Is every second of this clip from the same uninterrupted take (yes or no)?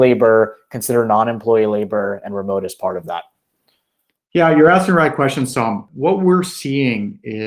yes